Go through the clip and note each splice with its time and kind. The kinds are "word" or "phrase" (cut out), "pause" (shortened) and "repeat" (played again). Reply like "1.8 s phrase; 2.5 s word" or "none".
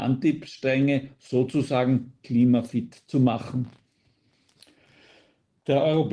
none

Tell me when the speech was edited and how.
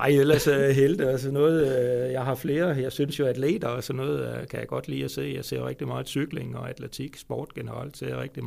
none

